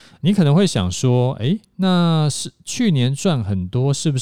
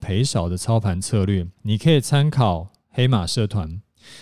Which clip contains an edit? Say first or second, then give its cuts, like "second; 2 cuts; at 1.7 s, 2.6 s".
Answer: second; 1 cut; at 1.6 s